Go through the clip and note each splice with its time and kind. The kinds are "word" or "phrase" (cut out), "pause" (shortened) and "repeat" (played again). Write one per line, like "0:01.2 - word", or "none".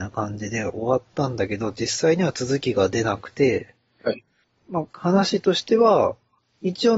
0:04.9 - pause